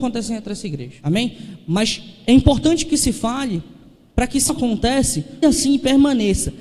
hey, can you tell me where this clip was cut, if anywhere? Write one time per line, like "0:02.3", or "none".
0:04.5
0:05.4